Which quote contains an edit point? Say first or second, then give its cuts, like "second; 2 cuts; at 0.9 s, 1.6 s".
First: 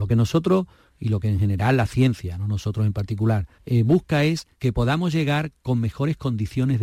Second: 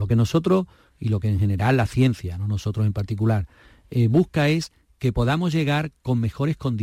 first; 2 cuts; at 3.5 s, 4.5 s